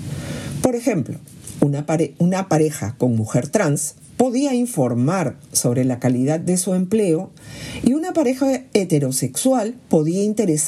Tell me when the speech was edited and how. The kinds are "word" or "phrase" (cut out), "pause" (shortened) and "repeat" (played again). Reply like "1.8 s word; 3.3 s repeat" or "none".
none